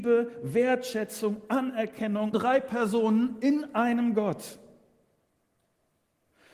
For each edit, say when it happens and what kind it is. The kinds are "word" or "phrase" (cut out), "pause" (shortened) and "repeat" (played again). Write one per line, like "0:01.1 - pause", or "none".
0:02.3 - phrase

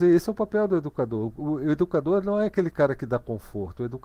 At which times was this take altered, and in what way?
none

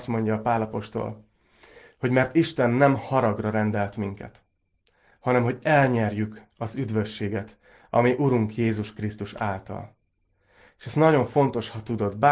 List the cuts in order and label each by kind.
none

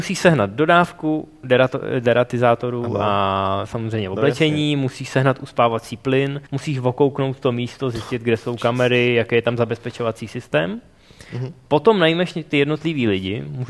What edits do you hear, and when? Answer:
0:06.5 - pause

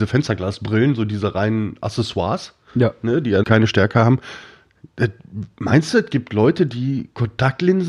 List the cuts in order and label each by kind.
0:03.4 - word

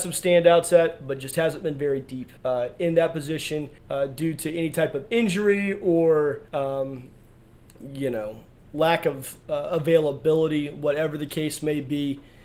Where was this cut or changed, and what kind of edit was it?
0:02.4 - pause
0:03.8 - pause
0:06.5 - pause
0:08.6 - pause

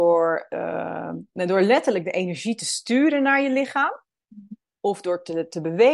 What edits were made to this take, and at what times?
none

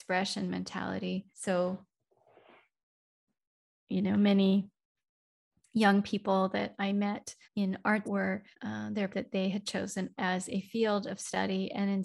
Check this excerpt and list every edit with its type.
0:01.3 - pause
0:07.4 - pause
0:08.0 - word
0:08.5 - pause
0:09.1 - phrase
0:10.1 - word

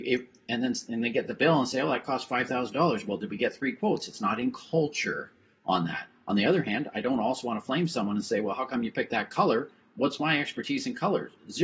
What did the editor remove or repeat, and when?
none

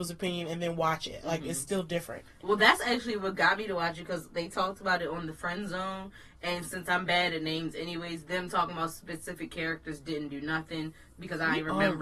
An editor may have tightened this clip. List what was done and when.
none

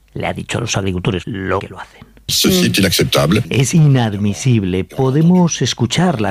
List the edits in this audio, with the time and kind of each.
0:01.2 - word
0:01.6 - word
0:03.7 - word

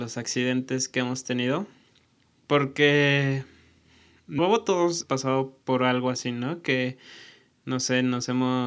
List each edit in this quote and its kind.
0:04.4 - word
0:05.0 - word
0:05.6 - pause

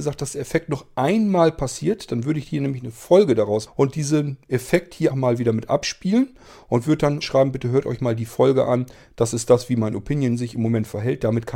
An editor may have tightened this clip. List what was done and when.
0:03.7 - word
0:05.1 - word
0:07.2 - word

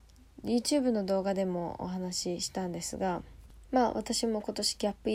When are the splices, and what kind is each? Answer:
0:03.7 - pause

